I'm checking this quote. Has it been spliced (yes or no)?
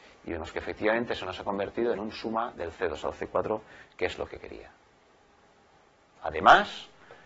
no